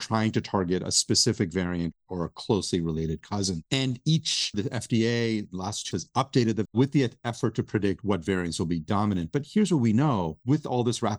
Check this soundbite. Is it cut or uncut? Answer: cut